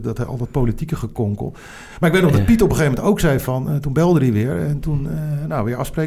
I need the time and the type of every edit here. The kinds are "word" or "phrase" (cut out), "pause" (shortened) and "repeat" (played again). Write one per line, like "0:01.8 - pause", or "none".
none